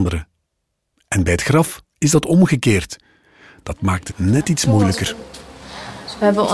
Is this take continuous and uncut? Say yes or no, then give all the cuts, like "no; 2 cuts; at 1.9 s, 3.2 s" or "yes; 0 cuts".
no; 2 cuts; at 1.9 s, 4.1 s